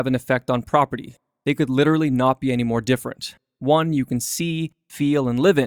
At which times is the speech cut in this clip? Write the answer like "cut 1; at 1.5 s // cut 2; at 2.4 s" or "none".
none